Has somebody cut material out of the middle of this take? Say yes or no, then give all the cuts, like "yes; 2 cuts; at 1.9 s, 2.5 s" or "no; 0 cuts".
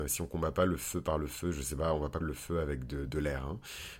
yes; 2 cuts; at 2.2 s, 3.1 s